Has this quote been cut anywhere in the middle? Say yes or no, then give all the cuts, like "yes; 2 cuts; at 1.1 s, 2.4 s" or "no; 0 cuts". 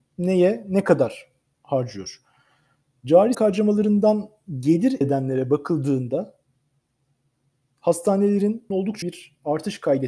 yes; 4 cuts; at 3.3 s, 5.0 s, 8.7 s, 9.0 s